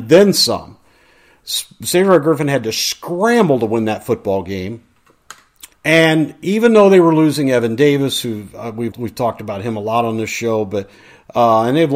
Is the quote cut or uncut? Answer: cut